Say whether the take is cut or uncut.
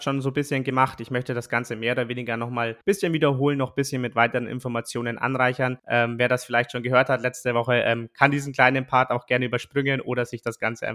cut